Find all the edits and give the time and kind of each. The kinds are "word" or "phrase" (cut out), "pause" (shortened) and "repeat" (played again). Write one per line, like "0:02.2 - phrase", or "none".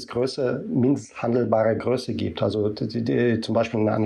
none